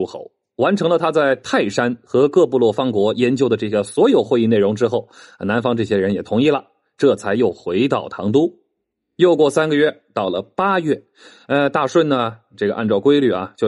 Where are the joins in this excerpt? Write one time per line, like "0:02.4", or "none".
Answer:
none